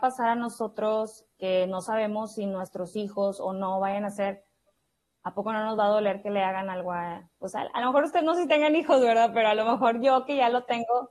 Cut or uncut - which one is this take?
uncut